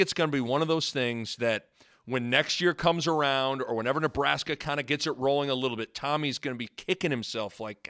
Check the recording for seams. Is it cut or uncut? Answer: uncut